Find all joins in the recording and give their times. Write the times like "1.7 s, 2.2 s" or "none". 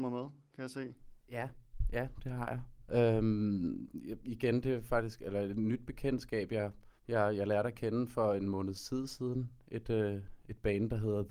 7.0 s